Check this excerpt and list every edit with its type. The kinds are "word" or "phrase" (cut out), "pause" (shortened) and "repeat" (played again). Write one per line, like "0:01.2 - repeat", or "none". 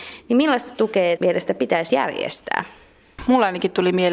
0:01.2 - word
0:01.9 - word